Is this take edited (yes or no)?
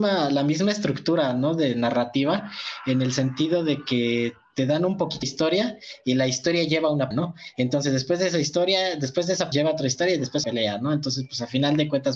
yes